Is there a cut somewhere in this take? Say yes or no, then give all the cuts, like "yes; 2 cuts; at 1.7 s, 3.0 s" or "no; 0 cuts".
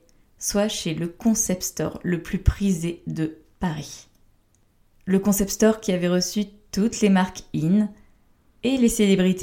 no; 0 cuts